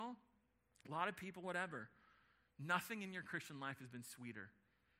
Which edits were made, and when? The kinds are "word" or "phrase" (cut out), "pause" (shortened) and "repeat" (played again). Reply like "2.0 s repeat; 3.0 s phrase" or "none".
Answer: none